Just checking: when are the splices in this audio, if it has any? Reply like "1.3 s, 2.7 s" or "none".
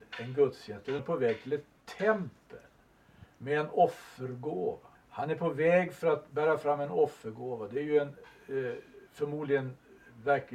1.0 s, 4.9 s, 9.1 s